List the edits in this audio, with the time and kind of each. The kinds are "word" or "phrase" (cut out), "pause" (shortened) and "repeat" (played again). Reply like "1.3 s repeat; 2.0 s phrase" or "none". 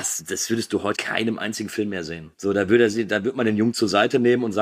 0.9 s word